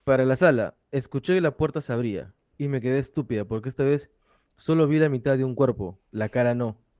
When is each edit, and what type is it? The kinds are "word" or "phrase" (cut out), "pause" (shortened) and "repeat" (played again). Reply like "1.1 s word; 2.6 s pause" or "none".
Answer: none